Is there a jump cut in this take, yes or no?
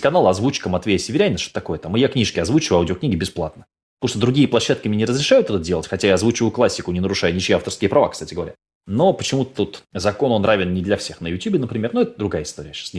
no